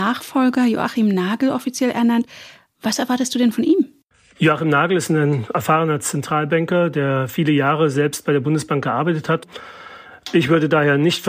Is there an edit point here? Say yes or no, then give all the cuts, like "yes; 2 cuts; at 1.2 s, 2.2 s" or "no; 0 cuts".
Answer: no; 0 cuts